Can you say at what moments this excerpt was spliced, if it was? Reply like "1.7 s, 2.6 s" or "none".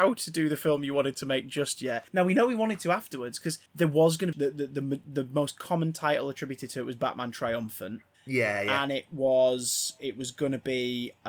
2.1 s, 3.7 s, 4.3 s, 8.1 s